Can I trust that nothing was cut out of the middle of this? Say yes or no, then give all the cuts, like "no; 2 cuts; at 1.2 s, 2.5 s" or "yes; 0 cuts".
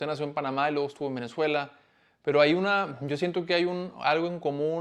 yes; 0 cuts